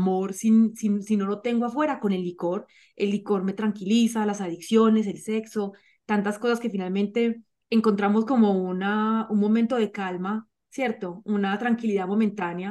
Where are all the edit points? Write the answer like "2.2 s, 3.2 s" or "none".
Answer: none